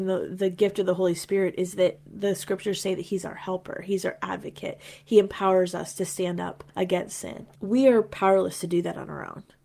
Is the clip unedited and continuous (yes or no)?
no